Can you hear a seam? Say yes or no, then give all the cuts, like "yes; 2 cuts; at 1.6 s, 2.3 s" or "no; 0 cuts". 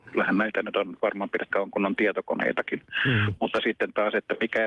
yes; 1 cut; at 1.5 s